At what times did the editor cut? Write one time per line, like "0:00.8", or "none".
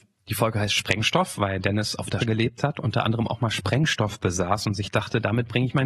0:02.2